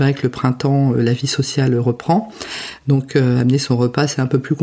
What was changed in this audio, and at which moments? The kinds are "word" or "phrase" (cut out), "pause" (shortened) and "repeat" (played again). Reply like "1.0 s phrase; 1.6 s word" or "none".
none